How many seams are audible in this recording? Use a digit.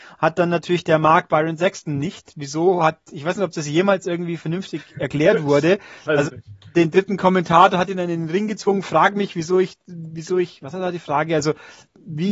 1